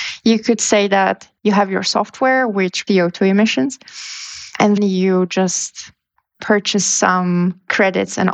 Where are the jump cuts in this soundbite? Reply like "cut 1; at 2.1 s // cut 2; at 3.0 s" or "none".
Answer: cut 1; at 1.4 s // cut 2; at 2.9 s // cut 3; at 4.8 s // cut 4; at 6.1 s